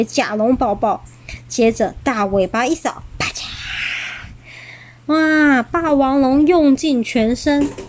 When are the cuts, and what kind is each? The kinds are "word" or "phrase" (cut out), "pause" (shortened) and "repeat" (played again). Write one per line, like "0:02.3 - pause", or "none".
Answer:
none